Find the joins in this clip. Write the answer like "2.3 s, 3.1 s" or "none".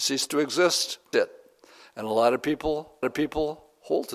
1.1 s, 3.0 s